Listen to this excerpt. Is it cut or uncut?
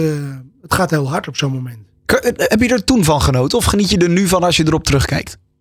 uncut